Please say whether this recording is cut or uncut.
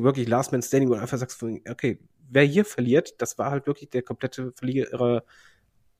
uncut